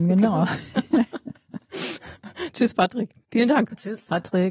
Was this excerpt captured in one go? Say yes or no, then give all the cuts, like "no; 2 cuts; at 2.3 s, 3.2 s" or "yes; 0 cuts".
no; 1 cut; at 3.2 s